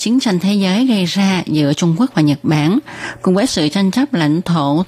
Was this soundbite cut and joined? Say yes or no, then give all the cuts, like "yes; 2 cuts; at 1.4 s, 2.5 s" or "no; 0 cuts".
no; 0 cuts